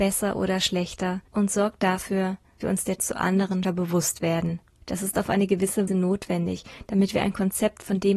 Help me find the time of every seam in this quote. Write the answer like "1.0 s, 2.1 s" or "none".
1.3 s, 2.6 s, 3.0 s, 3.6 s, 4.8 s, 5.9 s